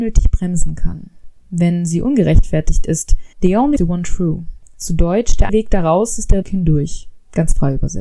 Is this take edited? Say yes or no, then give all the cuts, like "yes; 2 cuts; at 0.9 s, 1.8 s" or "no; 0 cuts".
yes; 5 cuts; at 1.4 s, 3.3 s, 3.8 s, 5.5 s, 6.4 s